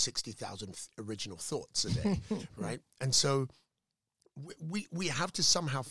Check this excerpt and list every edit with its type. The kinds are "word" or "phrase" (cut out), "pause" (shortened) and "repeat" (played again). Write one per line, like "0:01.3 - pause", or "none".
none